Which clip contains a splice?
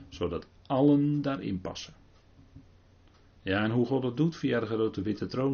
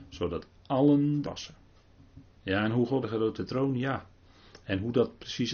second; 4 cuts; at 1.2 s, 2.3 s, 3.0 s, 3.4 s

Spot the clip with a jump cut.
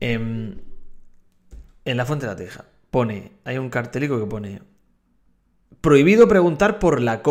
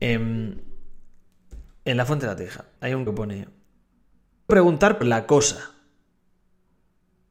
second; 4 cuts; at 2.8 s, 3.1 s, 4.5 s, 5.0 s

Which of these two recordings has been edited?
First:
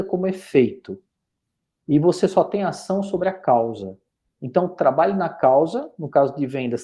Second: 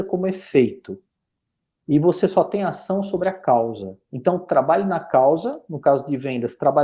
second; 1 cut; at 4.0 s

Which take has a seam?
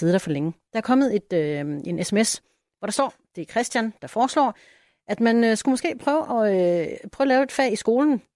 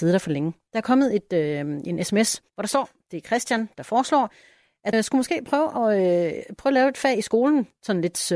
second; 2 cuts; at 2.5 s, 4.9 s

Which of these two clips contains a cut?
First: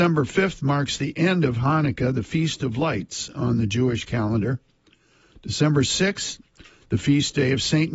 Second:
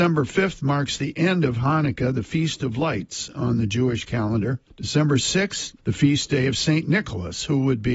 second; 2 cuts; at 4.7 s, 5.8 s

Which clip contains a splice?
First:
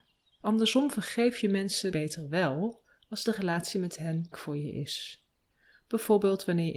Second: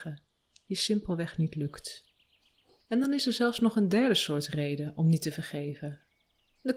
first; 2 cuts; at 1.9 s, 4.3 s

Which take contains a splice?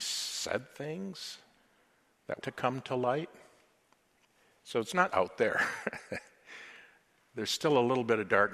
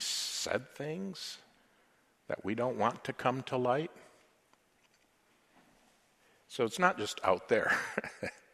first; 3 cuts; at 2.4 s, 4.3 s, 5.1 s

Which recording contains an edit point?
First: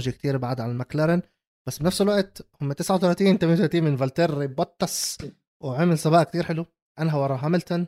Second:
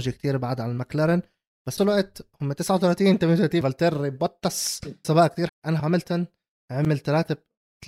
second; 5 cuts; at 1.8 s, 3.6 s, 5.0 s, 5.5 s, 5.8 s

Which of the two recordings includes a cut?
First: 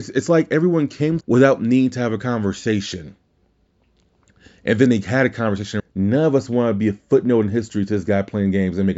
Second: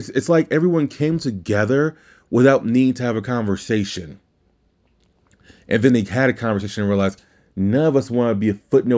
first; 2 cuts; at 1.2 s, 5.8 s

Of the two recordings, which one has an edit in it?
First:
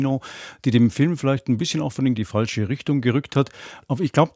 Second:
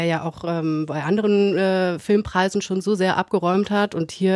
first; 1 cut; at 2.2 s

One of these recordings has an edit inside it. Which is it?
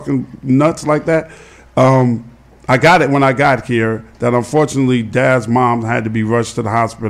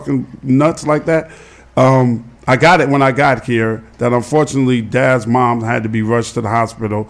second; 1 cut; at 2.4 s

